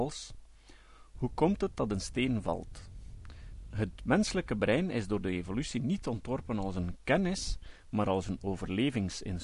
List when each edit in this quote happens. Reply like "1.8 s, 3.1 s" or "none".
none